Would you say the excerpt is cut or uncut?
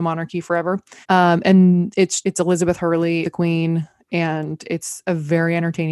cut